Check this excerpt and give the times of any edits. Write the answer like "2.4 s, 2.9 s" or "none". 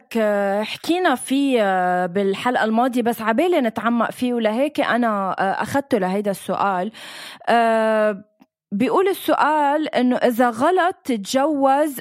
none